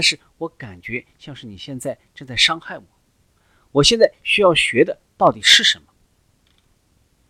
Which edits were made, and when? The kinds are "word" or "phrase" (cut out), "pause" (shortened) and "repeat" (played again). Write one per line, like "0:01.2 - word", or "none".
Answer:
none